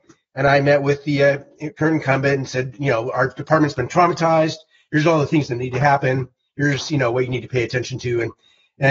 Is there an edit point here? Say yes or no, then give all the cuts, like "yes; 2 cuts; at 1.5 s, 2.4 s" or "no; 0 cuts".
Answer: no; 0 cuts